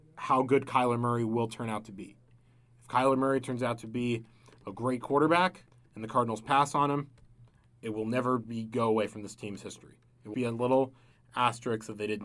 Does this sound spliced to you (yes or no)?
yes